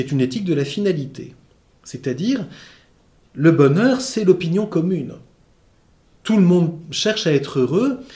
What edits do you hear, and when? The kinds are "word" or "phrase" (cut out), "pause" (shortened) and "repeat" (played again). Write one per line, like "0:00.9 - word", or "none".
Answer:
none